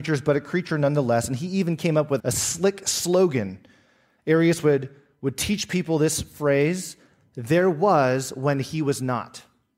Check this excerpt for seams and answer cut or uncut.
cut